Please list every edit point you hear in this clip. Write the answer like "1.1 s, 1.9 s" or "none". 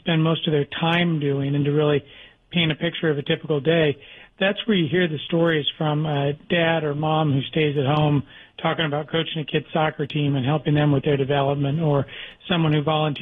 none